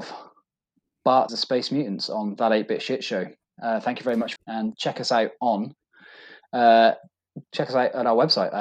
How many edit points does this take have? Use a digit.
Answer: 4